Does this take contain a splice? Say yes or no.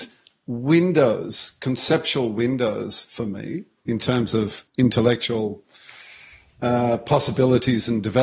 yes